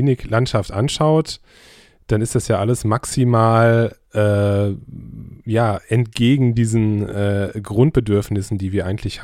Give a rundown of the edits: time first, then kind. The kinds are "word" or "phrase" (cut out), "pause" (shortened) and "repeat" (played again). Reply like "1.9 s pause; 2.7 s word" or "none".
none